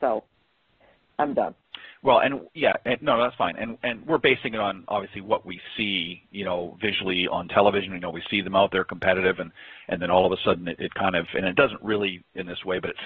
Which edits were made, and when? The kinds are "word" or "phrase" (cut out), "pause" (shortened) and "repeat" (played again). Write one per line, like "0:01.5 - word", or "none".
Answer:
none